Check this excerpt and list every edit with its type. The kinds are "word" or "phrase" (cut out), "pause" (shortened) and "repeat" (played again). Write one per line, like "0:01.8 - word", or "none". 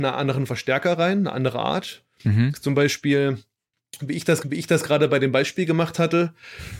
0:04.4 - repeat